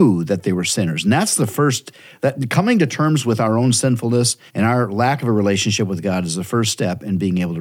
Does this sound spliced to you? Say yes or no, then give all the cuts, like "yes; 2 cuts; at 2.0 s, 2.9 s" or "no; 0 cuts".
yes; 1 cut; at 4.5 s